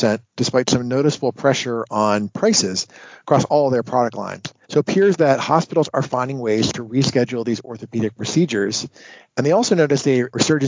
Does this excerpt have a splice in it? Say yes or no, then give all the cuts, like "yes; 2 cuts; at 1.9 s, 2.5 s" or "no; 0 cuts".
yes; 1 cut; at 4.6 s